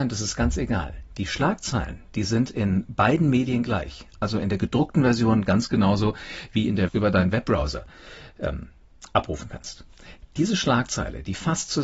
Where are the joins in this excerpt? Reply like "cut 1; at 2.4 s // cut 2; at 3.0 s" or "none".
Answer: cut 1; at 6.9 s